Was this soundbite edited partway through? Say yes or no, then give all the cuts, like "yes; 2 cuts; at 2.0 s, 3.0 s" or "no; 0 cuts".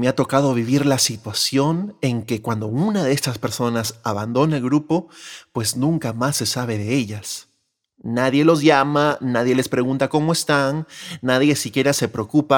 no; 0 cuts